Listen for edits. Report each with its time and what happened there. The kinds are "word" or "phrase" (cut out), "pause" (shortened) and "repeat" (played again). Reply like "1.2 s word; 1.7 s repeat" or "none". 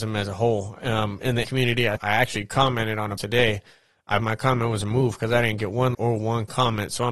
1.4 s word; 2.0 s word; 3.2 s word; 4.2 s word; 5.9 s word